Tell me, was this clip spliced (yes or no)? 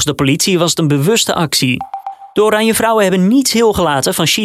yes